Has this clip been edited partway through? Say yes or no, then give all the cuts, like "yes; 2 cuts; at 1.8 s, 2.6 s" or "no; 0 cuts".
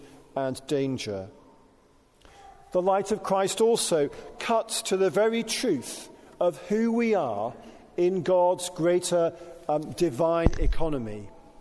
no; 0 cuts